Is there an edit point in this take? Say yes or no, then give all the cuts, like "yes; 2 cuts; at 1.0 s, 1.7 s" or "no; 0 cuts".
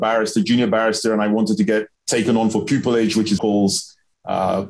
yes; 2 cuts; at 1.9 s, 3.4 s